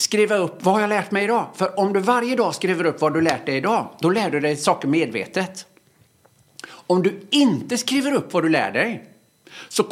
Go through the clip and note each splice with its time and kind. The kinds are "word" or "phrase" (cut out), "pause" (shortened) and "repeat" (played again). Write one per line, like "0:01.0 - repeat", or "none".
none